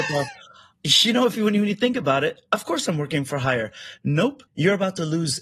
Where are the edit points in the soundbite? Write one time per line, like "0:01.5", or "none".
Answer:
0:04.5

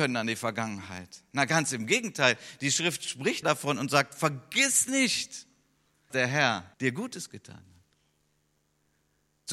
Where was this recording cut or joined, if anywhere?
0:03.4
0:06.1
0:06.7

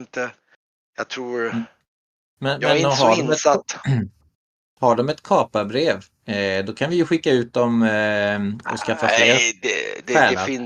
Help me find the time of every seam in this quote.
none

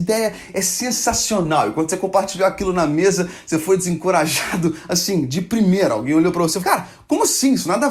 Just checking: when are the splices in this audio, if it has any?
0:06.6

